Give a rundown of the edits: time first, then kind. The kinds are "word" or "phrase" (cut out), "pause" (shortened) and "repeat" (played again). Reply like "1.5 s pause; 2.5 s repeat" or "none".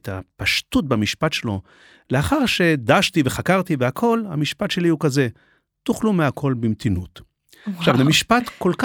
none